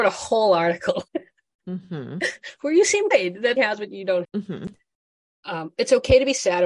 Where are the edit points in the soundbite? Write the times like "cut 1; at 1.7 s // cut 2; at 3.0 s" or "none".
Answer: cut 1; at 1.1 s // cut 2; at 3.1 s // cut 3; at 3.6 s // cut 4; at 4.2 s